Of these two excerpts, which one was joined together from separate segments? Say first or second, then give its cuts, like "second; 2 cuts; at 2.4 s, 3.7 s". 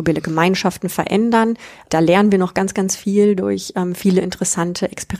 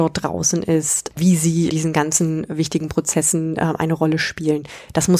second; 1 cut; at 1.7 s